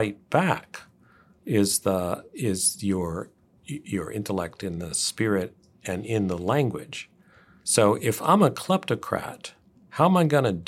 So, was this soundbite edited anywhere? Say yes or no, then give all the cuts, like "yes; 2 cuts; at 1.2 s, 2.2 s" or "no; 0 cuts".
no; 0 cuts